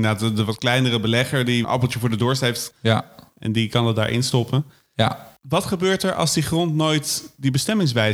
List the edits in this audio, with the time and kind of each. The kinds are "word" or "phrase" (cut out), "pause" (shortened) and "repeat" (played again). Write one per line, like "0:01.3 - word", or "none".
none